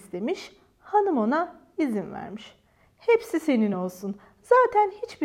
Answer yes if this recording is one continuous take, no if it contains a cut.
yes